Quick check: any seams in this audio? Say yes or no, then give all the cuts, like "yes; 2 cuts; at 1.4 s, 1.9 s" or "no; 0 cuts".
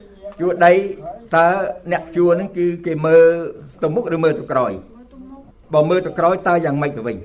yes; 1 cut; at 5.5 s